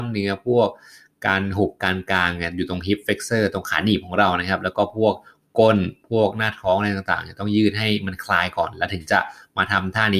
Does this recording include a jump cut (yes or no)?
no